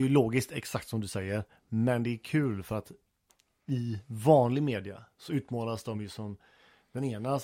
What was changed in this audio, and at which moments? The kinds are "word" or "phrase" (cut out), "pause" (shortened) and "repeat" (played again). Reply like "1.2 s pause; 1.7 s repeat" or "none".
none